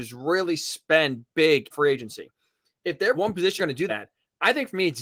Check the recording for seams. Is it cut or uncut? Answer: cut